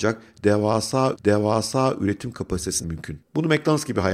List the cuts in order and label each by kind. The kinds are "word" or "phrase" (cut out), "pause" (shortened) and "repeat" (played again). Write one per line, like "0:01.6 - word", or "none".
0:01.1 - repeat
0:02.8 - word